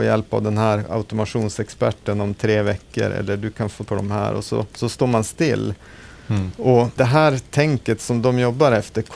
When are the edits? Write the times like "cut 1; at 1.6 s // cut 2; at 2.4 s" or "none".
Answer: cut 1; at 3.9 s // cut 2; at 4.7 s // cut 3; at 7.0 s